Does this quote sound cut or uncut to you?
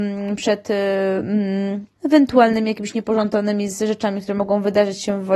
cut